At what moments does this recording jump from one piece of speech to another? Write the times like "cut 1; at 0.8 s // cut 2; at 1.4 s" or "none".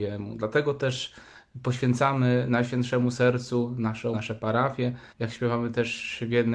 cut 1; at 4.1 s // cut 2; at 5.1 s